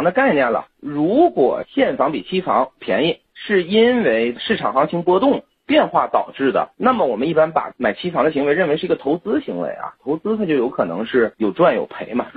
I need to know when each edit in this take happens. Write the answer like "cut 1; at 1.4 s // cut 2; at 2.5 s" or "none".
cut 1; at 6.7 s